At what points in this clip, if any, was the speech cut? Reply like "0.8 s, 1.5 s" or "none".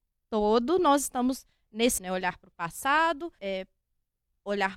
2.0 s, 3.4 s